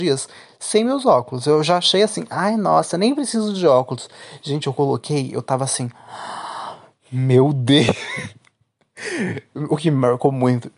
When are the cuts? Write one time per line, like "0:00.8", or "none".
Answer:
none